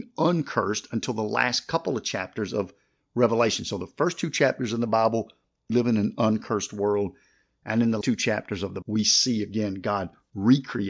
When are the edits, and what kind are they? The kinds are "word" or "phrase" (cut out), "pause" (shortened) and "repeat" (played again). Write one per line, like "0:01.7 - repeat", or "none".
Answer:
0:05.7 - word
0:08.0 - word
0:08.8 - word